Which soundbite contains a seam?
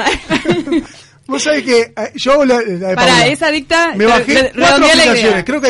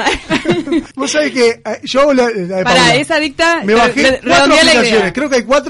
second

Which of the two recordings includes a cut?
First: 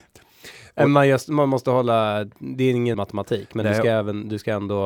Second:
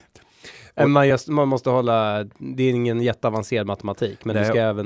first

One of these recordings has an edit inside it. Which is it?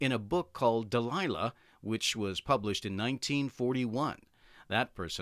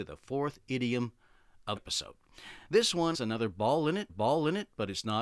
second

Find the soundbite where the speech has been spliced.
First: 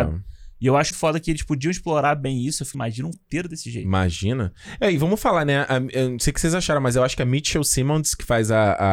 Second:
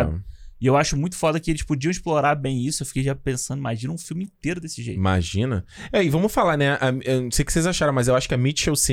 first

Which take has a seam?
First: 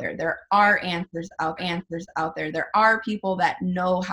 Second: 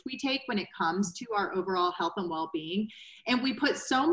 first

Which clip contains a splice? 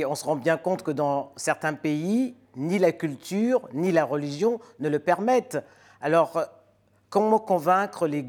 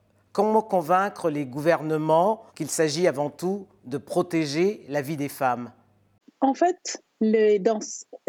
second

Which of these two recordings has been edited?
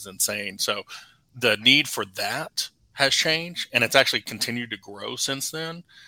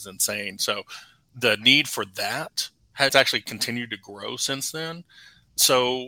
second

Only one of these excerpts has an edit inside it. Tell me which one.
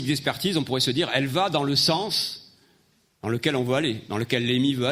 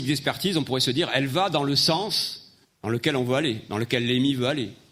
second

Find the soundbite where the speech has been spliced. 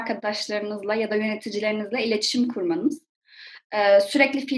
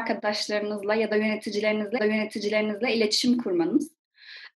second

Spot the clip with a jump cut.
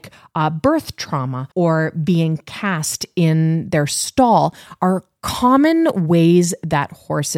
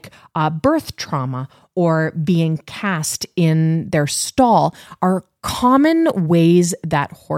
first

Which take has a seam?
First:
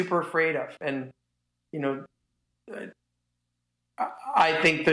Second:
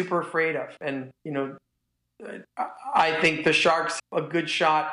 second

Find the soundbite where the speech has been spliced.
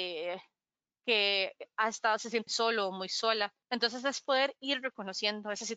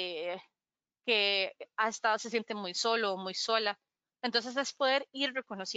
first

